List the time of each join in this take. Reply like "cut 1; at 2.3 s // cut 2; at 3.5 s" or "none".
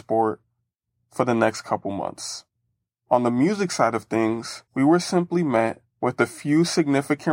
cut 1; at 4.7 s // cut 2; at 5.9 s

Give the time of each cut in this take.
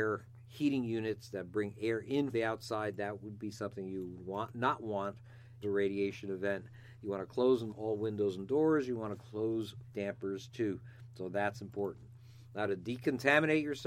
cut 1; at 2.3 s // cut 2; at 5.6 s // cut 3; at 7.7 s // cut 4; at 9.9 s

